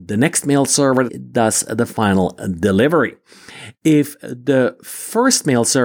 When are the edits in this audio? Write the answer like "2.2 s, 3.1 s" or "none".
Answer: 1.1 s